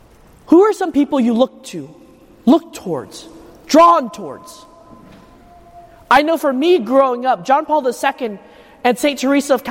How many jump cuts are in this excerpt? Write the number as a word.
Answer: zero